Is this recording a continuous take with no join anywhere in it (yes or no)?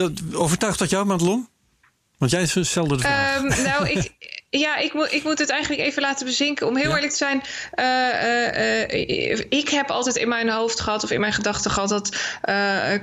yes